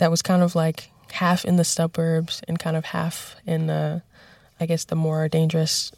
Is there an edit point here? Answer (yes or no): no